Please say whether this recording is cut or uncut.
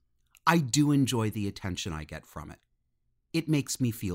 uncut